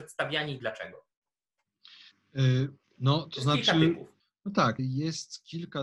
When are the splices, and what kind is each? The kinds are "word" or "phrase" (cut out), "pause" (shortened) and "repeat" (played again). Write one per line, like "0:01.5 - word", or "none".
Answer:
0:02.8 - pause
0:04.2 - pause
0:04.8 - word